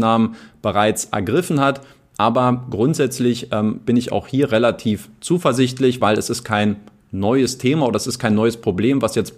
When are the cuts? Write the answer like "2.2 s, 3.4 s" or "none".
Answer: none